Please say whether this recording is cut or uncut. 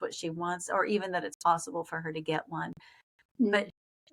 uncut